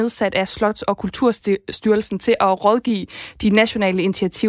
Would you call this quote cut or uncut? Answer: uncut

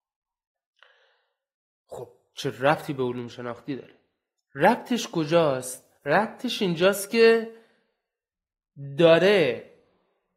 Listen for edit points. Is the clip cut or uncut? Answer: cut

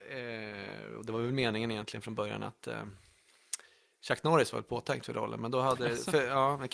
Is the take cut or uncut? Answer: uncut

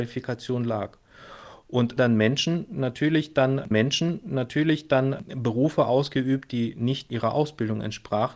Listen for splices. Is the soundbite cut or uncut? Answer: cut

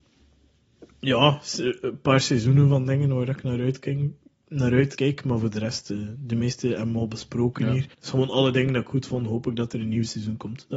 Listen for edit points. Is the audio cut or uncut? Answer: cut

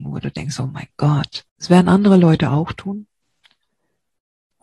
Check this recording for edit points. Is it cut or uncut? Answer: cut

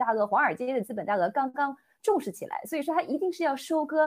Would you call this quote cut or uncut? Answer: uncut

